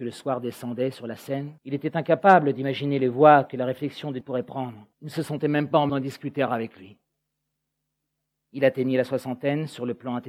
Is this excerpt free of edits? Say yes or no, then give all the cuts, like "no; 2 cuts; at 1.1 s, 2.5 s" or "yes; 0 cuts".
no; 4 cuts; at 1.6 s, 4.2 s, 4.9 s, 5.9 s